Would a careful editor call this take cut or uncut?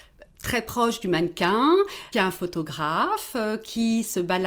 cut